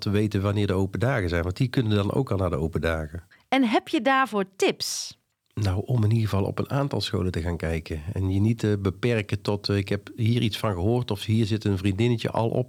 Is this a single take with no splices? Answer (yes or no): yes